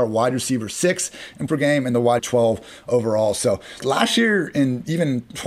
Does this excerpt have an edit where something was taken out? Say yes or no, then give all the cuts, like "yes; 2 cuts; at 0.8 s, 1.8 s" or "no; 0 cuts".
yes; 3 cuts; at 1.5 s, 2.2 s, 3.8 s